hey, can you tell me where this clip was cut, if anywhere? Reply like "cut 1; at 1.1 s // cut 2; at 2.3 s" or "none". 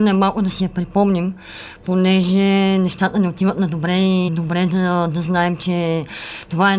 cut 1; at 4.3 s